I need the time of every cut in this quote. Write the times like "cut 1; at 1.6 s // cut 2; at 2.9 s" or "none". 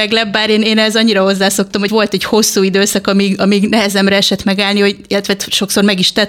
cut 1; at 1.9 s